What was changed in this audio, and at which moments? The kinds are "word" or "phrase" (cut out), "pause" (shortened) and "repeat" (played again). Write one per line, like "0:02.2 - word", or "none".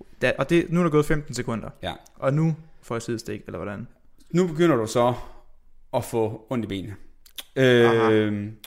none